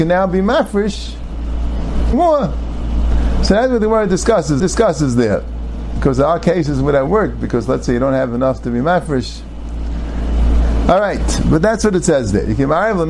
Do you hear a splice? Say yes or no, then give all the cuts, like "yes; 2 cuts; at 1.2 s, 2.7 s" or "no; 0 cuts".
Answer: yes; 3 cuts; at 2.1 s, 4.6 s, 7.1 s